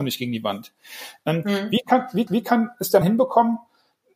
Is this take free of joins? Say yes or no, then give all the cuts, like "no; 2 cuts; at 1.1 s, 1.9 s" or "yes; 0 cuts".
no; 2 cuts; at 2.3 s, 3.0 s